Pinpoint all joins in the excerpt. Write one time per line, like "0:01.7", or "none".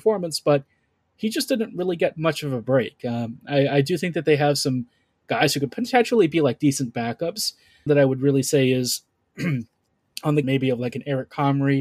0:07.9
0:10.4